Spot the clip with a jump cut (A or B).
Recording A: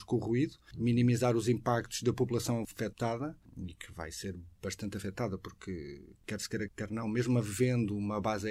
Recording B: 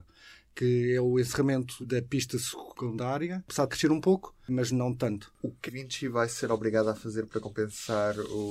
B